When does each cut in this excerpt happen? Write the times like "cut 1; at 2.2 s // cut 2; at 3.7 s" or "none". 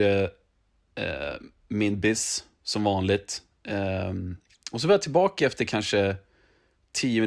none